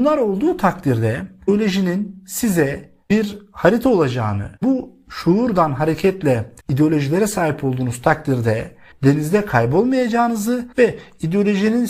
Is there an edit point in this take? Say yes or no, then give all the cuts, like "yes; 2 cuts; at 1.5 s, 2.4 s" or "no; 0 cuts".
yes; 5 cuts; at 3.0 s, 4.6 s, 6.6 s, 8.9 s, 10.7 s